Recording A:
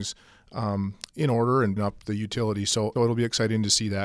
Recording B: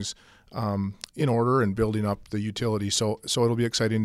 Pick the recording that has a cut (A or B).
A